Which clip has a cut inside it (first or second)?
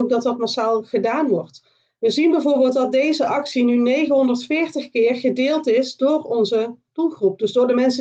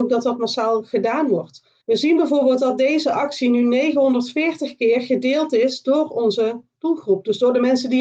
second